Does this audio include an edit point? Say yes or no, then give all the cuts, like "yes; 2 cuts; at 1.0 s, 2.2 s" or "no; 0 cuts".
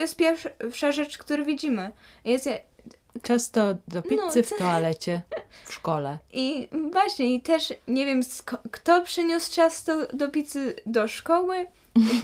no; 0 cuts